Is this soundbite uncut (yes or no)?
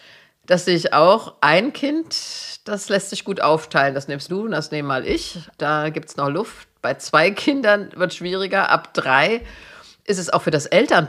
no